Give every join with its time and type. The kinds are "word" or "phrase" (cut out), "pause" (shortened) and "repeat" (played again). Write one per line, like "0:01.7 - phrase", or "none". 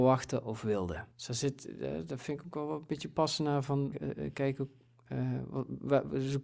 0:01.1 - pause
0:03.9 - word